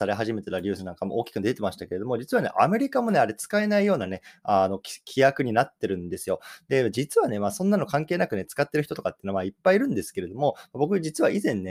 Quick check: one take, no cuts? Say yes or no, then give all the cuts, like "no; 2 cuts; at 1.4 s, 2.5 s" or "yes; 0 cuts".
yes; 0 cuts